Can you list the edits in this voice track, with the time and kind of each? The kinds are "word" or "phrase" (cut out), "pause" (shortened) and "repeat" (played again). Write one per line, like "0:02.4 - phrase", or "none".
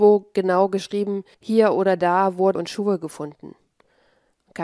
0:01.3 - pause
0:02.5 - word